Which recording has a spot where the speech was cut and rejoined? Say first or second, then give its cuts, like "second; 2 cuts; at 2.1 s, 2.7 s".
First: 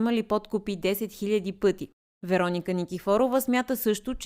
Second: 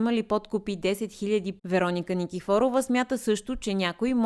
second; 1 cut; at 1.6 s